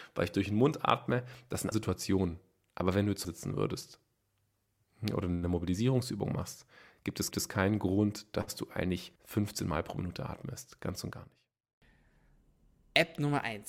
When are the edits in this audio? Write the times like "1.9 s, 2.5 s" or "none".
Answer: 1.7 s, 3.2 s, 7.3 s, 9.2 s